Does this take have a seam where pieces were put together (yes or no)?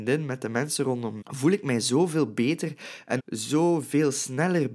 yes